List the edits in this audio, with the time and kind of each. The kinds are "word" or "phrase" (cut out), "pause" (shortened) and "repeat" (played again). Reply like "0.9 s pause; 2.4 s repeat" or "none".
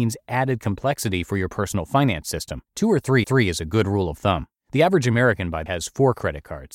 2.7 s pause; 3.2 s repeat; 4.6 s pause; 5.7 s word